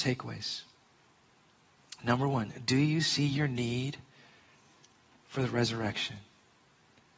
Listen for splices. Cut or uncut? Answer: uncut